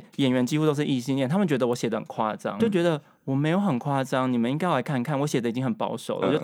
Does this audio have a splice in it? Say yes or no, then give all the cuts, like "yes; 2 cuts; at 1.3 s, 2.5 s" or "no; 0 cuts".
yes; 1 cut; at 2.6 s